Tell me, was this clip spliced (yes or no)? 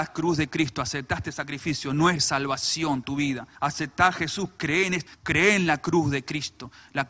yes